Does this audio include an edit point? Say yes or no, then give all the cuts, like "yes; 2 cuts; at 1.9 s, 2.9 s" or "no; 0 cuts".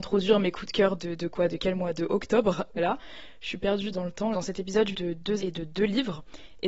yes; 6 cuts; at 1.0 s, 2.8 s, 3.9 s, 4.3 s, 4.9 s, 5.4 s